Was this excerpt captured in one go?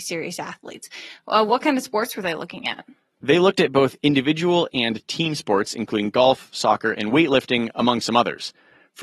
yes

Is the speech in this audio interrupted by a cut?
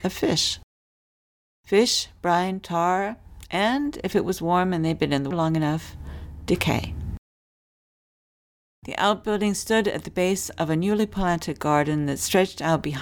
yes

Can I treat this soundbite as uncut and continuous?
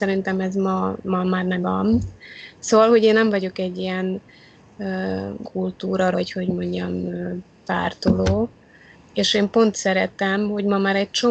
no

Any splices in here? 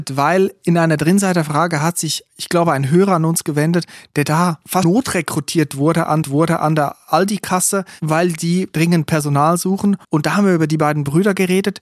yes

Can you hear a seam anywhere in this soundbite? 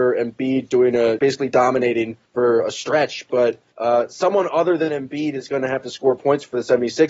yes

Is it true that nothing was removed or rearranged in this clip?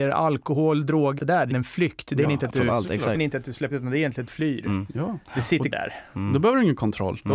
no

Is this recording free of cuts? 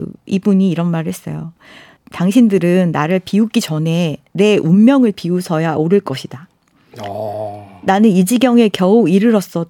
yes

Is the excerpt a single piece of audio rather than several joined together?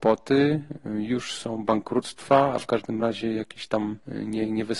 yes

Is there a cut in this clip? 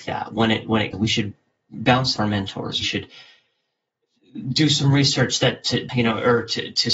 yes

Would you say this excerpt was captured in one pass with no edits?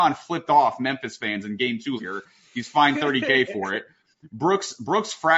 no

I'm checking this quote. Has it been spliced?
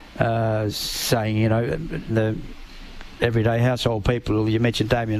yes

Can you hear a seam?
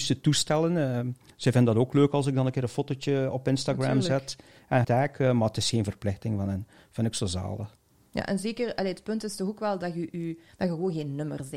yes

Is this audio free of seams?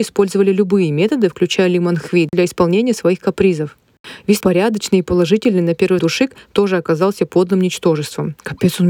no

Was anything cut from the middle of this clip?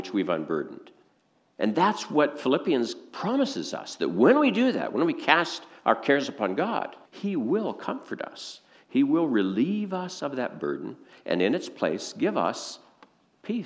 yes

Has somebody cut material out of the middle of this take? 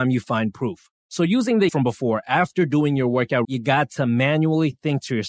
yes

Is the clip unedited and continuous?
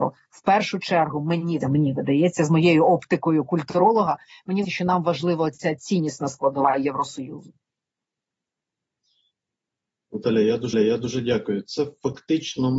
no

